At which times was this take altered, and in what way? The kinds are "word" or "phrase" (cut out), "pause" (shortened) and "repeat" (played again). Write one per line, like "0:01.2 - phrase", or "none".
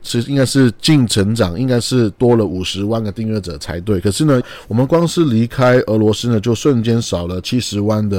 0:04.4 - word